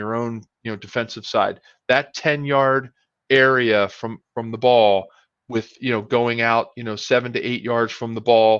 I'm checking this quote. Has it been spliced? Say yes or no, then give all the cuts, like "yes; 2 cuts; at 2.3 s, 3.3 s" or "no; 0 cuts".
no; 0 cuts